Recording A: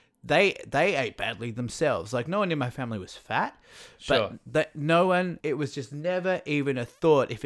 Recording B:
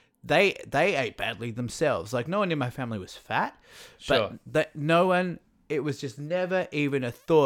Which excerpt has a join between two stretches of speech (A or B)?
A